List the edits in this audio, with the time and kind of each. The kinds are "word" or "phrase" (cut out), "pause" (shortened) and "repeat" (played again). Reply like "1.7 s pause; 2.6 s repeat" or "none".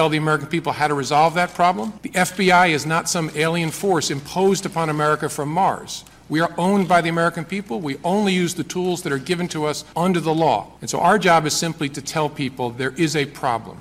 none